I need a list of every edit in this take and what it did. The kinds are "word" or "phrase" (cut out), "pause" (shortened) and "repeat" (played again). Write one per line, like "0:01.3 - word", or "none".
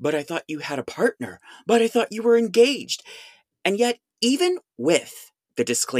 none